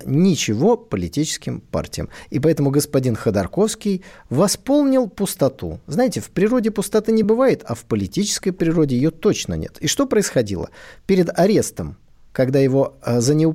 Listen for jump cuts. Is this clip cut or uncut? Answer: uncut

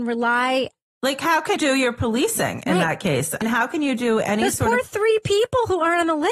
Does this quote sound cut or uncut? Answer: cut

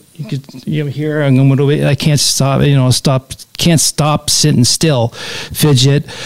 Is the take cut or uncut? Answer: cut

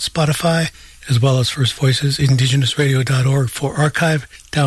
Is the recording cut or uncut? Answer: uncut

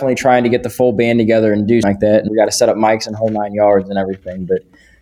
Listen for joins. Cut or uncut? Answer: cut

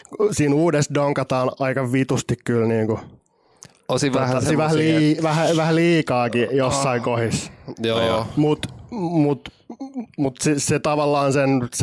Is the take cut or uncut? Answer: uncut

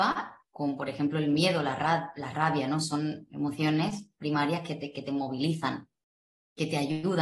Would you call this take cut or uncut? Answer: uncut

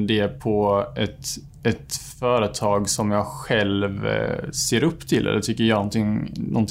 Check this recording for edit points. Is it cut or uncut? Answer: uncut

